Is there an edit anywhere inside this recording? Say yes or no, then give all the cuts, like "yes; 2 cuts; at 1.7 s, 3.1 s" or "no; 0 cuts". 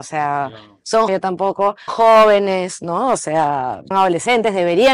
yes; 3 cuts; at 1.1 s, 1.9 s, 3.9 s